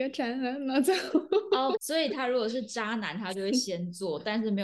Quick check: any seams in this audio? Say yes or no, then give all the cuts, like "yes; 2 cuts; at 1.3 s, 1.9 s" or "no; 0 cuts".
yes; 1 cut; at 1.8 s